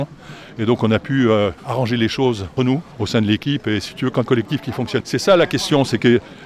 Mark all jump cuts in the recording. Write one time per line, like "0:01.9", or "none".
0:01.6
0:02.6
0:02.9
0:04.3
0:05.0